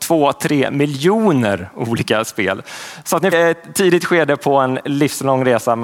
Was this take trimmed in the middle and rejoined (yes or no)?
yes